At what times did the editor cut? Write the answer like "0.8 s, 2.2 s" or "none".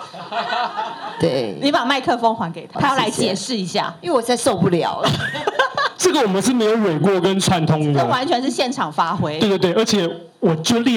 2.7 s